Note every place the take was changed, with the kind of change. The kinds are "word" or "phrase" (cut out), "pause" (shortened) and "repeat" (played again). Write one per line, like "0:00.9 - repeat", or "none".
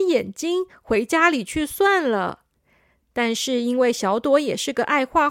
none